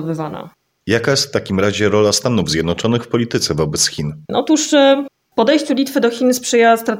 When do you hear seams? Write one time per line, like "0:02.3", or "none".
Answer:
0:04.2